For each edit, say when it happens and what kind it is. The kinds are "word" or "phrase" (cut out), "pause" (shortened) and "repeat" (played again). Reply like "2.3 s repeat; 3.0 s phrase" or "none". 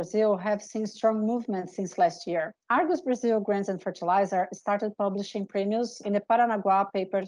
2.6 s pause; 6.0 s word